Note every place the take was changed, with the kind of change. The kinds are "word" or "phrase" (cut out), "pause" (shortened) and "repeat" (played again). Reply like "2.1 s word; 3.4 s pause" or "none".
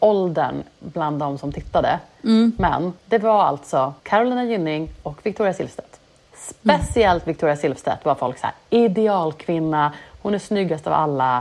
3.0 s pause; 4.0 s pause